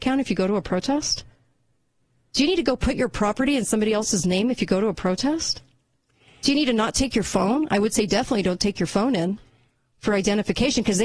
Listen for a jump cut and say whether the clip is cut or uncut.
uncut